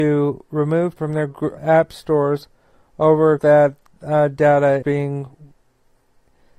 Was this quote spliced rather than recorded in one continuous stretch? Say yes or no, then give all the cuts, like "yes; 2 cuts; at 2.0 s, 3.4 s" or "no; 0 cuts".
yes; 4 cuts; at 1.0 s, 1.6 s, 3.4 s, 4.8 s